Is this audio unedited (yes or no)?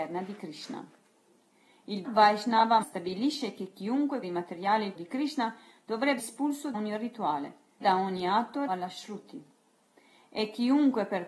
no